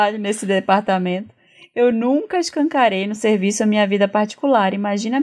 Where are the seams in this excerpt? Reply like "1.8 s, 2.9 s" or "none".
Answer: none